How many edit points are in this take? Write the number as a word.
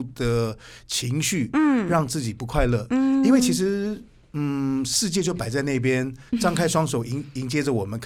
one